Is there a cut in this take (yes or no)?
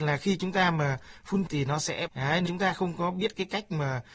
yes